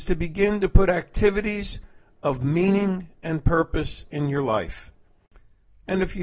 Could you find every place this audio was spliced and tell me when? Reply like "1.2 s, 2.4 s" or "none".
none